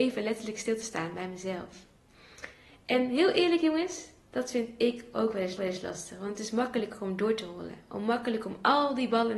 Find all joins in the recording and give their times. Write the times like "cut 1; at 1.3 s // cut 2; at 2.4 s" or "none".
cut 1; at 5.6 s